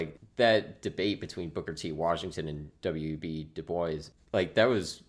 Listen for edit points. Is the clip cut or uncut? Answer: uncut